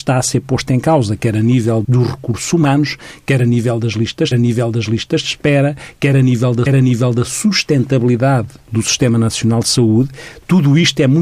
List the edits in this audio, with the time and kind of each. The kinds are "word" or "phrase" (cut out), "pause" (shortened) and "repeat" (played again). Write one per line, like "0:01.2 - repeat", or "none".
0:01.8 - word
0:04.3 - repeat
0:06.7 - repeat